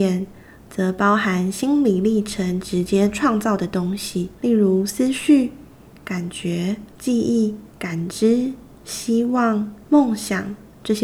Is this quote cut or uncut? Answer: cut